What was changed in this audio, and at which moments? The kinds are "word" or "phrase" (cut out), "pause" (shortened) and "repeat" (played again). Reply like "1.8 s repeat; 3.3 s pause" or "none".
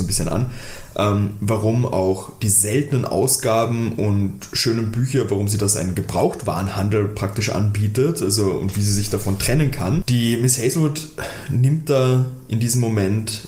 none